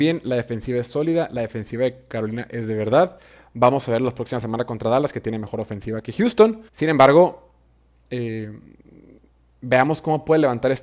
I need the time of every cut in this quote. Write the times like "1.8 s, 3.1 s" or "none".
6.7 s